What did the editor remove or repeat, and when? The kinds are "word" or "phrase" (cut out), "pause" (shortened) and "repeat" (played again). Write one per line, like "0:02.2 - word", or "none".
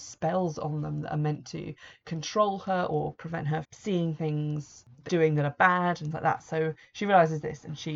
0:03.6 - word
0:05.1 - word
0:06.1 - word